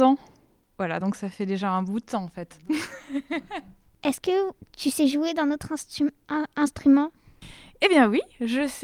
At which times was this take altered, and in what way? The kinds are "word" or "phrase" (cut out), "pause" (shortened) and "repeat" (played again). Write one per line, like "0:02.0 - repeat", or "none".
none